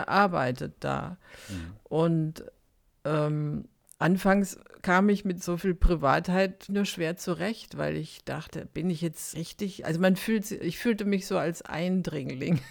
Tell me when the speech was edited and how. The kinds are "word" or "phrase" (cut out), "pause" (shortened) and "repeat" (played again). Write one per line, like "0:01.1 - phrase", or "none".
0:06.7 - word
0:09.3 - word